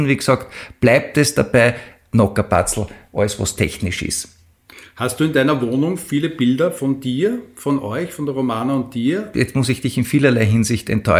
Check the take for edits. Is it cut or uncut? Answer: uncut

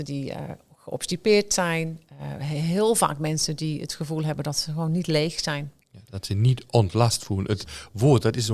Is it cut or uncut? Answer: uncut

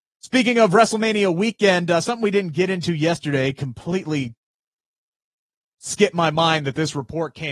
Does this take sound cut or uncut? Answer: uncut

